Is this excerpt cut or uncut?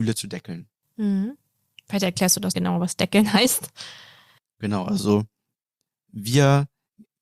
cut